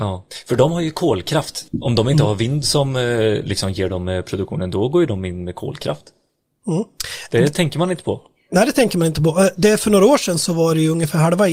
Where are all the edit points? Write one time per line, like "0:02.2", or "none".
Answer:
none